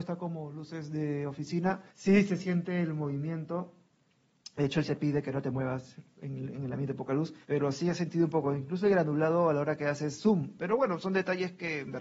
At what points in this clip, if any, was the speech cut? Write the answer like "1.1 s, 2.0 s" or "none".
1.9 s, 4.9 s, 7.4 s